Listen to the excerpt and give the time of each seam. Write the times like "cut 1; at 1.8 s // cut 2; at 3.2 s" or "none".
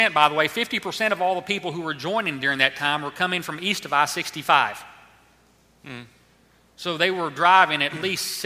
none